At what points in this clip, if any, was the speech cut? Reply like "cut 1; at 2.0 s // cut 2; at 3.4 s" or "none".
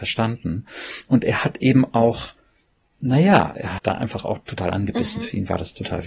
cut 1; at 3.5 s

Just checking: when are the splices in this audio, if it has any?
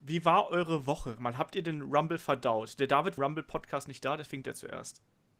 cut 1; at 1.2 s // cut 2; at 3.2 s // cut 3; at 4.4 s

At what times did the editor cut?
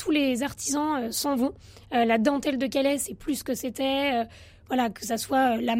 none

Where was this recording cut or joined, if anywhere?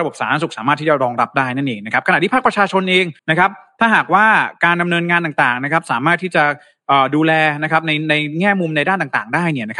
cut 1; at 3.2 s

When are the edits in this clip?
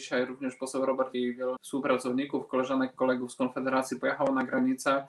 cut 1; at 1.1 s // cut 2; at 1.6 s

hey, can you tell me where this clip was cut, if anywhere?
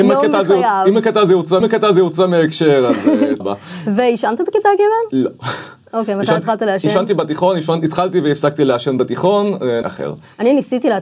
cut 1; at 1.6 s // cut 2; at 3.4 s // cut 3; at 9.8 s

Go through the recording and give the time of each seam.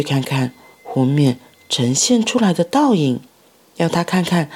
none

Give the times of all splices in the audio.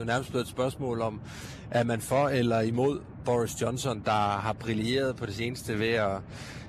none

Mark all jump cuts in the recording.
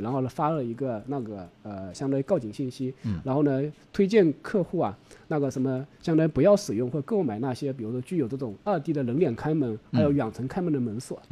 none

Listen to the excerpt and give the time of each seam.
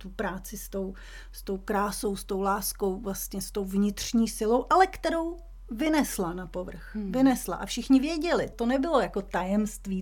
cut 1; at 8.5 s

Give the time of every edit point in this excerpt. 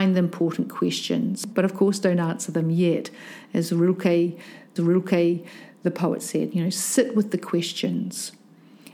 cut 1; at 4.8 s

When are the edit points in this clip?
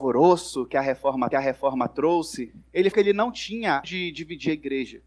cut 1; at 1.3 s // cut 2; at 2.9 s // cut 3; at 3.8 s

